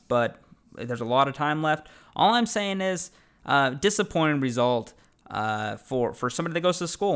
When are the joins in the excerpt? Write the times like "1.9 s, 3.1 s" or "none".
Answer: none